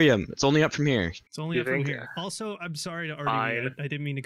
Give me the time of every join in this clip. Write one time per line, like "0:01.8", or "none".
0:01.3